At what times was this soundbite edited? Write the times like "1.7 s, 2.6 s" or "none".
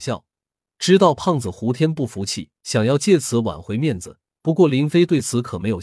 2.6 s, 4.2 s